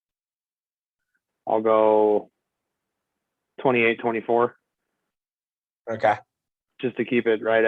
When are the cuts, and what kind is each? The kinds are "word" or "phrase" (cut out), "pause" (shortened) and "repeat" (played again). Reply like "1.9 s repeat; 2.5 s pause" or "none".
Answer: none